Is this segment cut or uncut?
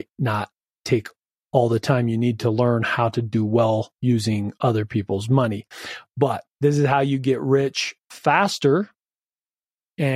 uncut